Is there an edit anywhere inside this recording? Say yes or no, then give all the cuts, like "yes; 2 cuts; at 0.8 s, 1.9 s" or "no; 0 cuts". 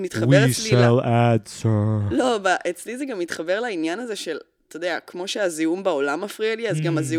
no; 0 cuts